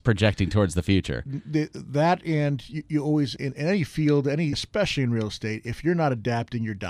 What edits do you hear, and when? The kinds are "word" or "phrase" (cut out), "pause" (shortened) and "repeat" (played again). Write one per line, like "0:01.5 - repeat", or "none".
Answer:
0:03.4 - word
0:04.5 - word